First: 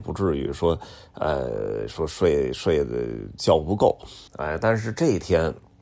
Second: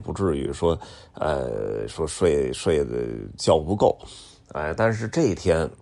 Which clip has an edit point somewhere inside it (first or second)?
first